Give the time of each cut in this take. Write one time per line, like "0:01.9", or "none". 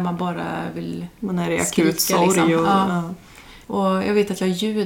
0:01.1
0:03.6